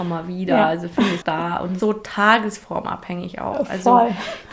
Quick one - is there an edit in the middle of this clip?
yes; 2 cuts; at 1.2 s, 1.8 s

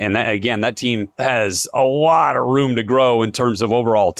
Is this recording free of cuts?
no; 1 cut; at 1.1 s

